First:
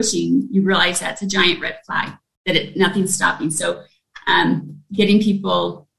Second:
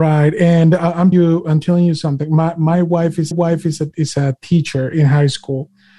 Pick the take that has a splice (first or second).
second